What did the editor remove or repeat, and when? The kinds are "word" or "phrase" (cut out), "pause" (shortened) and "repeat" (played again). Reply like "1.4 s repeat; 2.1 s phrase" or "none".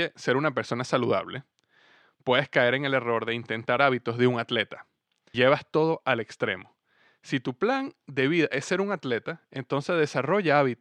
3.8 s word; 5.3 s word